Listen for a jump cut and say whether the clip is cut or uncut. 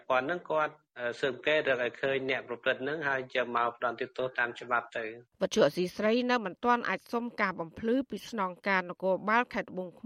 cut